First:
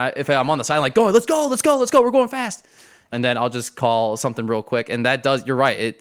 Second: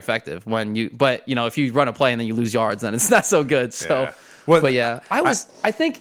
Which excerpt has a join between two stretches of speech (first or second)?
first